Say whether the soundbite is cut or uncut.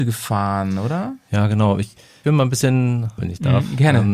cut